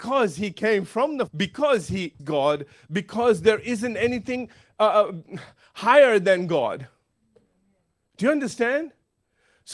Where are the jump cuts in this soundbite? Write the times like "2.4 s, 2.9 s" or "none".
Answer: 1.3 s, 2.2 s